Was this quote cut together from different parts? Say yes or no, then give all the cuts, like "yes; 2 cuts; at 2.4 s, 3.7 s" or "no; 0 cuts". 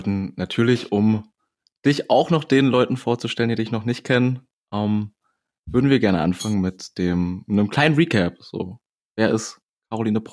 no; 0 cuts